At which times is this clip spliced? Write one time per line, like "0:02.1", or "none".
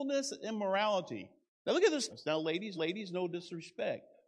0:01.5
0:02.1
0:02.8